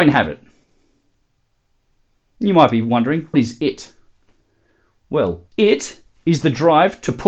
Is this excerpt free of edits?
no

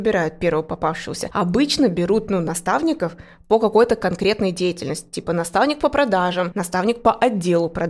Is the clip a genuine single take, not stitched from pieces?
yes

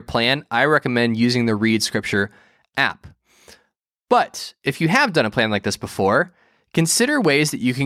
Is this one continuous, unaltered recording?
yes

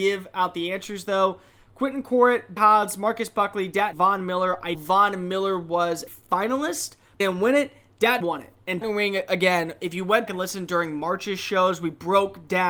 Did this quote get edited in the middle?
yes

